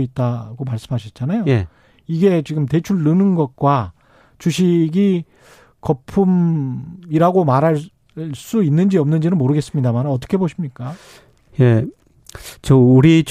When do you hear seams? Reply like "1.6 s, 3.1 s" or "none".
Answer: none